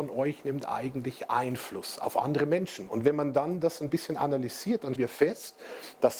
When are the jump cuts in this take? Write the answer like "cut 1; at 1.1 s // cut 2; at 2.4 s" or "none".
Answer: cut 1; at 5.0 s